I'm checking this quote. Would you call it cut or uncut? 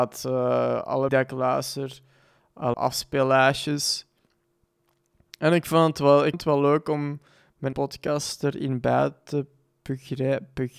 cut